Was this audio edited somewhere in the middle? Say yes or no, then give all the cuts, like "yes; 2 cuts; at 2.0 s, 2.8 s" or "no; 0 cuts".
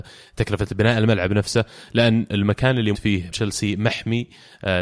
yes; 2 cuts; at 2.9 s, 3.3 s